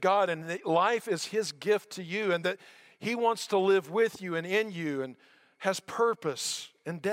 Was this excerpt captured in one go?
yes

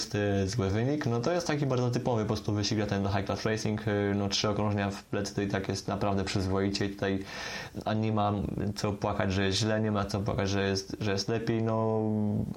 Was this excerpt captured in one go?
yes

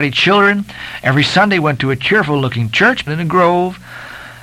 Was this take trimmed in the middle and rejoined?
yes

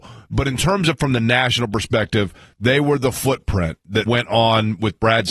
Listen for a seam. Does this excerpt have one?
yes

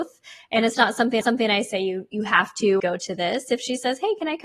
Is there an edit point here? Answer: yes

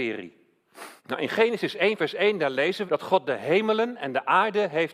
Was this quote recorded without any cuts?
no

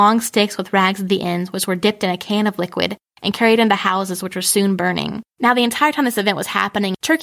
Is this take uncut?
no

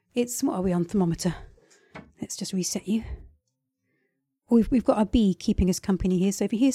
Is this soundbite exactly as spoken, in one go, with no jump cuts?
yes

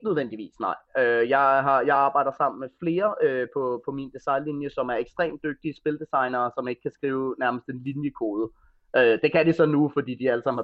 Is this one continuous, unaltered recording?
yes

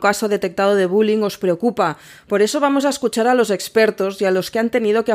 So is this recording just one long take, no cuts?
yes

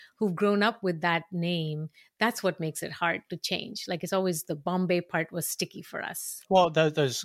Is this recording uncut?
yes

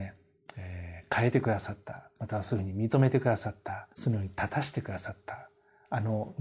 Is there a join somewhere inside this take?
yes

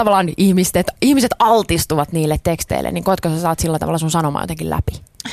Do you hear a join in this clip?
no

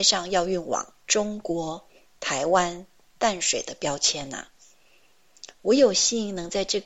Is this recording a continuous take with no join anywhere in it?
yes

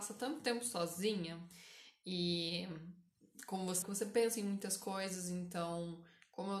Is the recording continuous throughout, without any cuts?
no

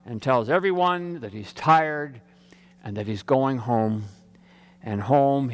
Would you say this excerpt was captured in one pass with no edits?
yes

